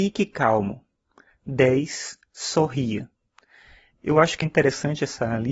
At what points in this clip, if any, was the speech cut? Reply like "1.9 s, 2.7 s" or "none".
4.4 s

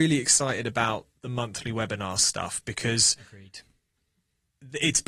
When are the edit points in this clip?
none

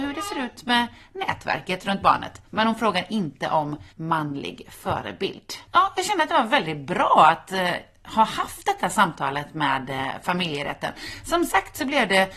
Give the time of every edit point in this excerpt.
3.9 s

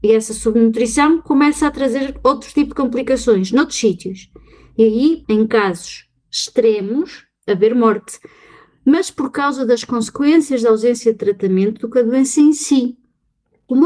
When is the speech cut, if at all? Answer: 5.2 s

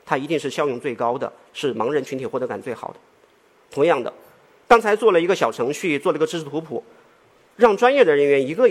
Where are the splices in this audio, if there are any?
none

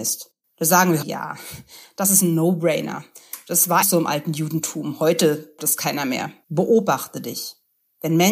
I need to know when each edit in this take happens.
1.0 s, 3.8 s, 5.6 s, 6.4 s

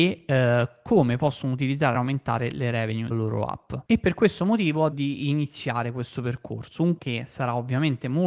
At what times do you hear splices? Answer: 1.9 s, 3.1 s, 3.9 s, 4.9 s, 7.0 s

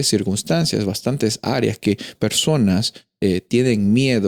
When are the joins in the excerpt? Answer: 2.1 s

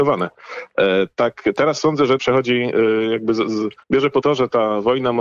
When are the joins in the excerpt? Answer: 2.2 s, 3.8 s, 4.2 s

